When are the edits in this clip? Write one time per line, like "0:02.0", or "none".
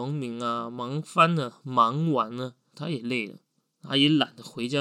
0:02.7

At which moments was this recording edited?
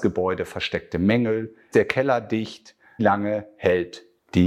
0:01.7
0:03.0

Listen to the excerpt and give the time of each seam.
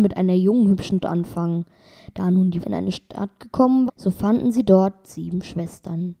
0:01.0
0:02.6
0:03.9

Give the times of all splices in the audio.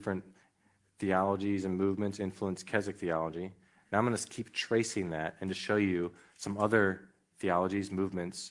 none

